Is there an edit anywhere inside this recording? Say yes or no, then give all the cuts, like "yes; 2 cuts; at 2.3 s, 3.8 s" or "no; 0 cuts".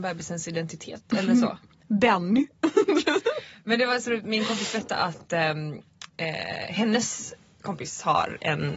no; 0 cuts